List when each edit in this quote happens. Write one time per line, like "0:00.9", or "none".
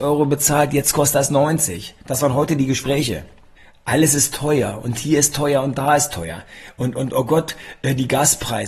0:03.6